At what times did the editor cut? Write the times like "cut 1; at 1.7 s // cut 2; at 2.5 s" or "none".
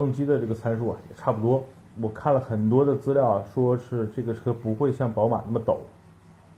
cut 1; at 1.8 s